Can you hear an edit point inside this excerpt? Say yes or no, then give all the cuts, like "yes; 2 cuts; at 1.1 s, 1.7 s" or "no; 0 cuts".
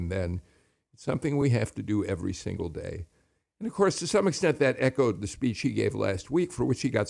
no; 0 cuts